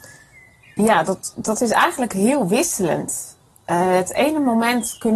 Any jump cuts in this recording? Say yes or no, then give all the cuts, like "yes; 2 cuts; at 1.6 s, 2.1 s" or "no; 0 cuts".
no; 0 cuts